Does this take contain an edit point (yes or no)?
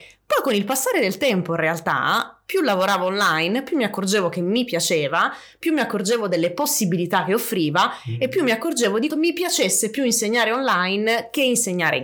yes